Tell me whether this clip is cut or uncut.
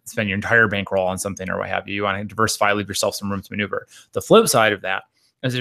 uncut